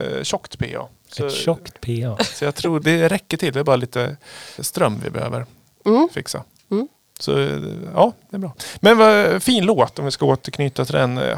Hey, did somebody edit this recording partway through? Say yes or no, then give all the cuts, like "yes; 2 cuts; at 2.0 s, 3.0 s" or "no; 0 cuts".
yes; 3 cuts; at 2.8 s, 4.6 s, 8.2 s